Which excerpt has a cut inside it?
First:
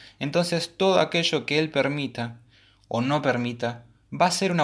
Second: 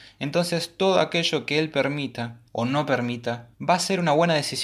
second; 2 cuts; at 2.5 s, 3.5 s

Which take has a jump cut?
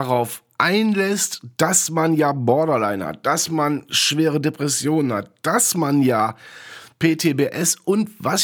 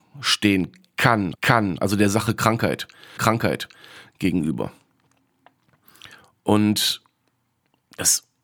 second; 2 cuts; at 1.3 s, 3.2 s

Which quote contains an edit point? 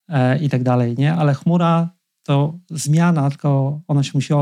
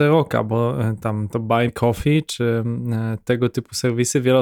second; 1 cut; at 1.7 s

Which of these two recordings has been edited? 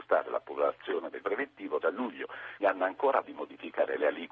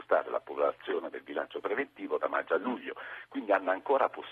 first; 4 cuts; at 1.2 s, 1.8 s, 2.6 s, 3.2 s

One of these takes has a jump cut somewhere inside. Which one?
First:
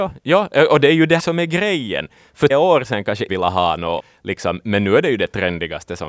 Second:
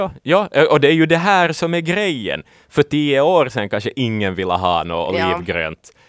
first; 4 cuts; at 1.2 s, 2.5 s, 3.3 s, 4.0 s

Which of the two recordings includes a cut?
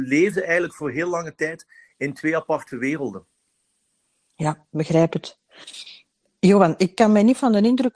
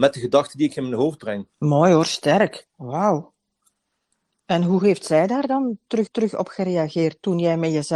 second; 3 cuts; at 1.5 s, 2.7 s, 6.1 s

